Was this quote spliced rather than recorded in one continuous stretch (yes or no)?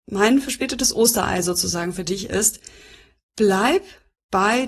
no